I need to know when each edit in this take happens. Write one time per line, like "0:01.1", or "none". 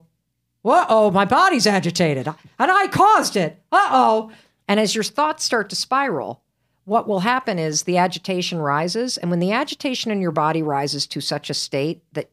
none